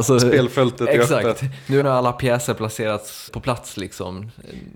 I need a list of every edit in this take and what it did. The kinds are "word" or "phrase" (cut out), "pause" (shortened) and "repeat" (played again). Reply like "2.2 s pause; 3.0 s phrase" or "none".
1.8 s word; 3.3 s word